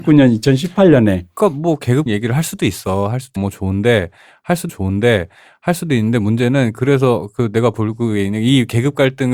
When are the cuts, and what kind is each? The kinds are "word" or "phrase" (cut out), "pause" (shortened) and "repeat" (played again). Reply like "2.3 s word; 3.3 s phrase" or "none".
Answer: 2.1 s word; 3.4 s word; 4.7 s repeat